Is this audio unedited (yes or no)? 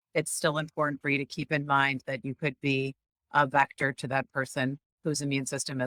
yes